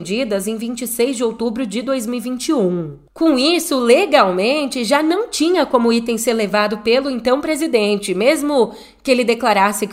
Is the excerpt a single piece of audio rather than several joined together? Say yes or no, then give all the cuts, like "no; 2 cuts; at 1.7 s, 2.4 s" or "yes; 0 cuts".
yes; 0 cuts